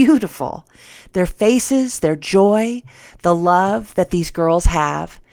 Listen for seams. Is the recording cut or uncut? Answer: uncut